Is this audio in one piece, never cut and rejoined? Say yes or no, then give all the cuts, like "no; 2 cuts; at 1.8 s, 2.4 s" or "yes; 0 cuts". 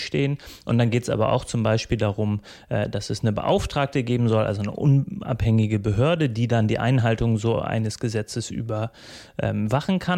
yes; 0 cuts